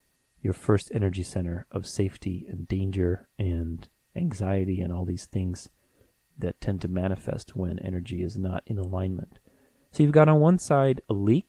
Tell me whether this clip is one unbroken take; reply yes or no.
yes